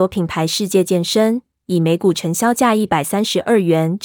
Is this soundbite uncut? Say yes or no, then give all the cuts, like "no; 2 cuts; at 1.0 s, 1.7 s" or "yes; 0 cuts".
yes; 0 cuts